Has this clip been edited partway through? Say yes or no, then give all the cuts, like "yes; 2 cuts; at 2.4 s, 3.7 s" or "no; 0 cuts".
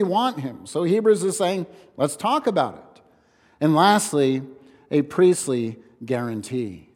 no; 0 cuts